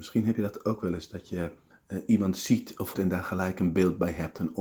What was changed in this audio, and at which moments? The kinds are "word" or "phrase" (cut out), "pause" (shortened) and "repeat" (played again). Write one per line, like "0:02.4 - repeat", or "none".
0:01.7 - pause
0:02.9 - word